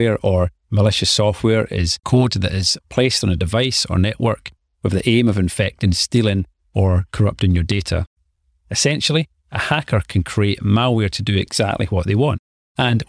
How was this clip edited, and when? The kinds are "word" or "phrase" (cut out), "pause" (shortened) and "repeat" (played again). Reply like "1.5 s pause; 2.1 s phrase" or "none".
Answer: none